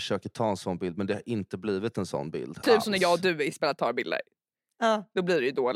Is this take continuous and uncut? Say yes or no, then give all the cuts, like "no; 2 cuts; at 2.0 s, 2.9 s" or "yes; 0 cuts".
yes; 0 cuts